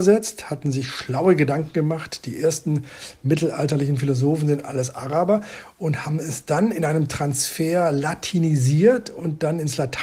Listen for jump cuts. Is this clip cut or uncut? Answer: uncut